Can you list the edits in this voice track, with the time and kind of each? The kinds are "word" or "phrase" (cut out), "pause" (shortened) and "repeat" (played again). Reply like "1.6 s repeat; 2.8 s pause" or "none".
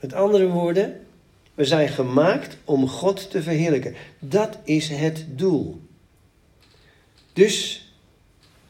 none